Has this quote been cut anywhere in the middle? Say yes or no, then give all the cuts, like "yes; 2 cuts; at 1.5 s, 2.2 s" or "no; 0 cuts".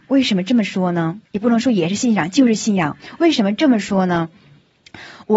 yes; 1 cut; at 1.2 s